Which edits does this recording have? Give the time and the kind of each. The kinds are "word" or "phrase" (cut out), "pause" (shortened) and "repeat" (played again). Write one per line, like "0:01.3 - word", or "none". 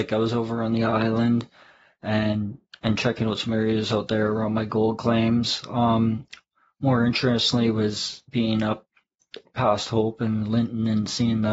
none